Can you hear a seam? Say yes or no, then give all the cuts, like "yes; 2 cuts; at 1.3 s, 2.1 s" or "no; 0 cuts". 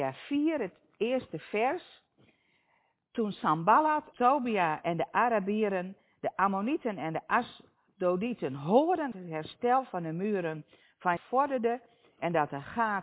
yes; 3 cuts; at 4.1 s, 9.1 s, 11.2 s